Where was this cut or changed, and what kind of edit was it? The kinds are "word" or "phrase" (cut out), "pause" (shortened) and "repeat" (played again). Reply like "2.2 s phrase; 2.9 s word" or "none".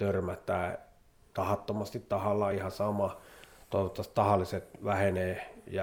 none